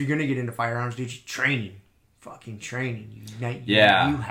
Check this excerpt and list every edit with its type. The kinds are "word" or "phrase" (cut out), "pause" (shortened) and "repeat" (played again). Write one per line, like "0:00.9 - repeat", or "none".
none